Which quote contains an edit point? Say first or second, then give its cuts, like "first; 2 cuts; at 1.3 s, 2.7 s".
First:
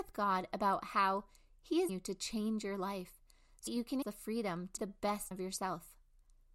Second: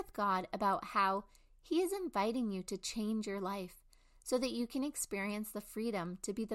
first; 5 cuts; at 1.9 s, 3.7 s, 4.0 s, 4.8 s, 5.3 s